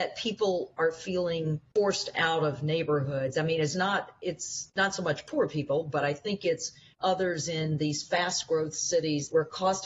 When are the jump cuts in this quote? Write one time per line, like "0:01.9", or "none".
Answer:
none